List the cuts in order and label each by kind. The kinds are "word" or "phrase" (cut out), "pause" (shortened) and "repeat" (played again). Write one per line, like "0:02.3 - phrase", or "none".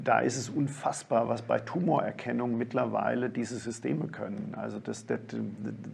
none